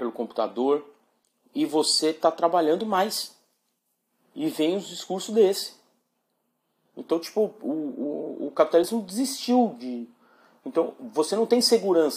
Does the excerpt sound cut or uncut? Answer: uncut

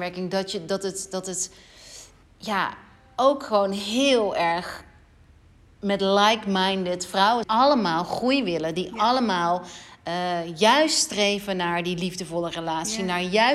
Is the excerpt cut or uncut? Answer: cut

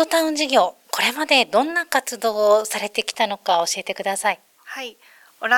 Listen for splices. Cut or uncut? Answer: cut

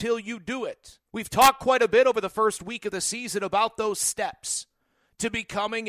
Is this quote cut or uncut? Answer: cut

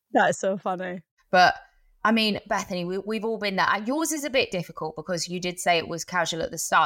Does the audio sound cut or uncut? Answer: uncut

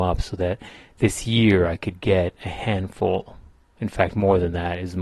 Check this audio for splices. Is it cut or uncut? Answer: uncut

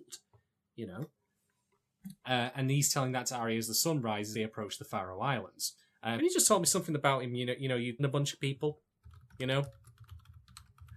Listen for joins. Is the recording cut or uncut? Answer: cut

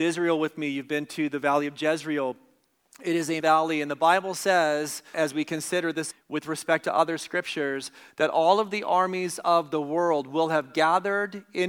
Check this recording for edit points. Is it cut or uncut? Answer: cut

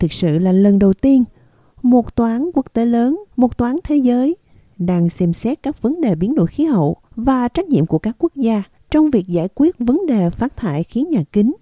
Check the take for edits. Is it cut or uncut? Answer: cut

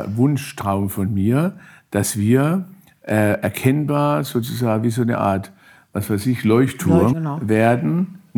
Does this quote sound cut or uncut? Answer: cut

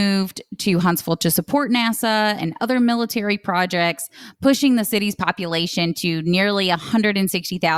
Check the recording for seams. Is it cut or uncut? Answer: uncut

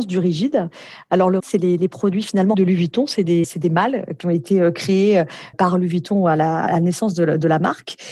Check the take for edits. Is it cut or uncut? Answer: cut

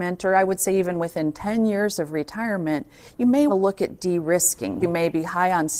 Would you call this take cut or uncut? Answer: cut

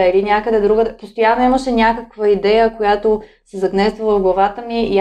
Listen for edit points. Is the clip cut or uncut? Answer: uncut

